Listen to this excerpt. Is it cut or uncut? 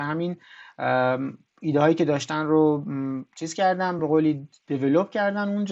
uncut